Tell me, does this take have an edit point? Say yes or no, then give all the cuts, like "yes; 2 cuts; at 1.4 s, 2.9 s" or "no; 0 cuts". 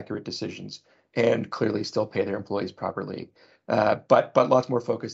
no; 0 cuts